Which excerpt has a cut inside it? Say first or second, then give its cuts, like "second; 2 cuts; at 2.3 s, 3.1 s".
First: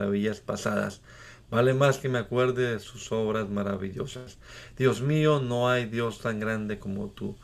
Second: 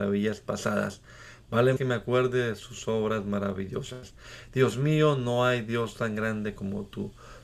second; 1 cut; at 1.8 s